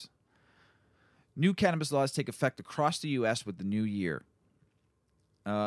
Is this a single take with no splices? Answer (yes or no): yes